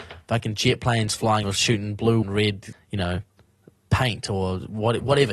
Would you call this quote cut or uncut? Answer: cut